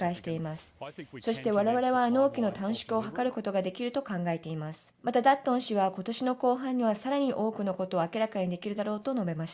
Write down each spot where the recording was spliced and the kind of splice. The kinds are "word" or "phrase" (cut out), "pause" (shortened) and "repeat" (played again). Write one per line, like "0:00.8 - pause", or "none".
0:05.0 - pause